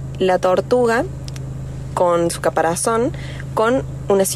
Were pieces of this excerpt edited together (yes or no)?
no